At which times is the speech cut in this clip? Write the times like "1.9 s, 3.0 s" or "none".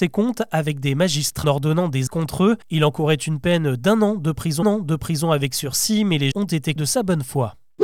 1.4 s, 2.1 s, 2.6 s, 4.6 s, 6.3 s, 6.8 s